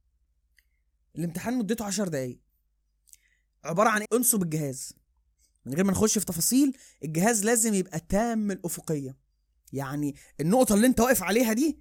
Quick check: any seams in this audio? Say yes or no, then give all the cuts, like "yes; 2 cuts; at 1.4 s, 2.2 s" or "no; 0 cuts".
yes; 1 cut; at 4.0 s